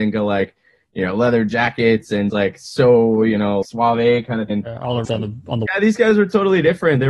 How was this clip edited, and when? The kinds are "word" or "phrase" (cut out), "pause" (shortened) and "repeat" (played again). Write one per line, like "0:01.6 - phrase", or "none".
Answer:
0:02.3 - word
0:03.6 - word
0:04.5 - word
0:05.0 - word
0:05.7 - word